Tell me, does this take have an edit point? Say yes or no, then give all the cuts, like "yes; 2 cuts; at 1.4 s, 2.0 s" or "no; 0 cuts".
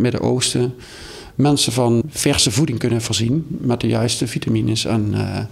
no; 0 cuts